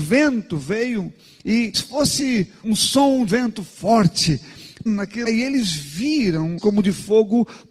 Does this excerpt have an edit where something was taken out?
yes; 6 cuts; at 1.7 s, 2.6 s, 3.3 s, 4.9 s, 5.3 s, 6.6 s

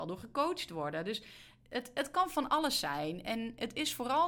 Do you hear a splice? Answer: no; 0 cuts

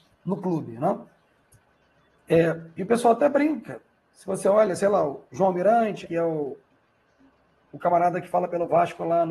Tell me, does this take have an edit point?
yes; 1 cut; at 6.0 s

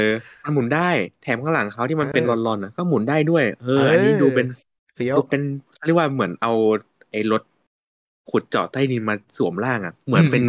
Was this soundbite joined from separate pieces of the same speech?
no; 0 cuts

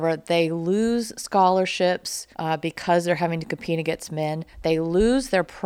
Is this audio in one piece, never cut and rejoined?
no; 1 cut; at 2.3 s

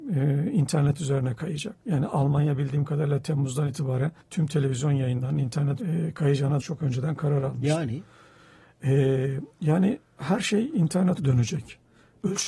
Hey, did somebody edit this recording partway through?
yes; 6 cuts; at 1.8 s, 4.2 s, 5.8 s, 6.6 s, 9.5 s, 11.2 s

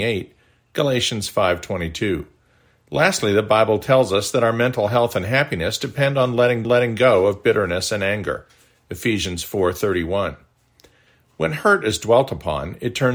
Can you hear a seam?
yes; 1 cut; at 6.6 s

